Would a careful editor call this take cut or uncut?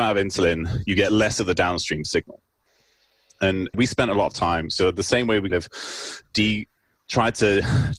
cut